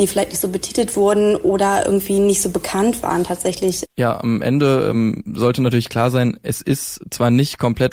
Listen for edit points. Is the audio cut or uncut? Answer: uncut